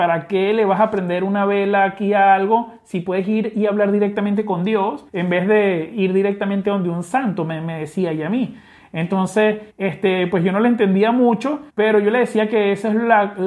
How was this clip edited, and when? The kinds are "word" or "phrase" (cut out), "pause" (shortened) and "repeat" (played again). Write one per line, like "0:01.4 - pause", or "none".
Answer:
0:05.1 - pause
0:09.7 - pause
0:11.7 - pause